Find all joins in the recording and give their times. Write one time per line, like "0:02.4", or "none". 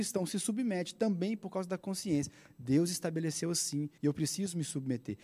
0:04.0